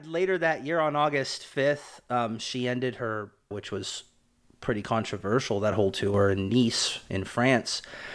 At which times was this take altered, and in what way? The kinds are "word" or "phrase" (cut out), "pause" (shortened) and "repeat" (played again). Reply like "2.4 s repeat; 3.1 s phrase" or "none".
3.5 s phrase

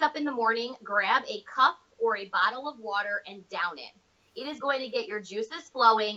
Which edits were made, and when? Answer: none

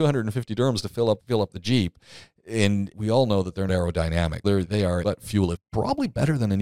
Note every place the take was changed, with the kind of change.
1.2 s word; 2.9 s word; 3.7 s word; 4.4 s word; 5.0 s word; 5.6 s word

